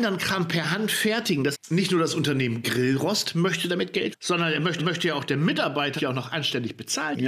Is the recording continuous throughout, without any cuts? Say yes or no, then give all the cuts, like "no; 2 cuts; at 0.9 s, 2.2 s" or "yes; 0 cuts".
no; 4 cuts; at 1.5 s, 4.1 s, 4.8 s, 6.0 s